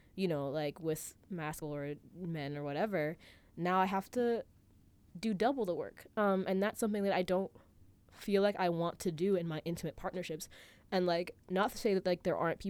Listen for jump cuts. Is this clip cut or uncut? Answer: cut